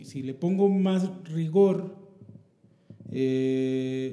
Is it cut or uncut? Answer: uncut